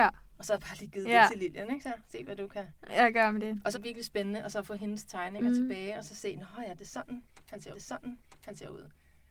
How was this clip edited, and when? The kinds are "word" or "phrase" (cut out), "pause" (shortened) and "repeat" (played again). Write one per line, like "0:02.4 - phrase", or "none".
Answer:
0:02.0 - word
0:03.7 - phrase
0:07.7 - repeat